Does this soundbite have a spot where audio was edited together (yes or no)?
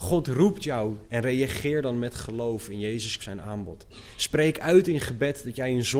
yes